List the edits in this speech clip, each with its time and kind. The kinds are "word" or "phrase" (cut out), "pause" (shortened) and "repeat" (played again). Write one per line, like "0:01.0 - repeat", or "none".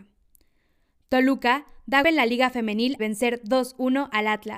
0:02.0 - word
0:03.0 - word

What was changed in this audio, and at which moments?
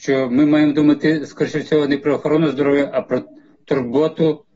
none

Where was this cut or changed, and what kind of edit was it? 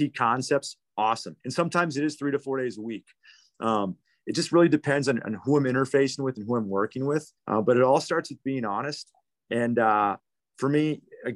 0:01.4 - pause
0:07.4 - pause

